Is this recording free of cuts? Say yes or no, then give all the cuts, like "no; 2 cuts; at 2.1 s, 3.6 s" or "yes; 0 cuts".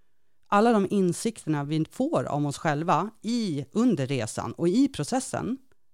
yes; 0 cuts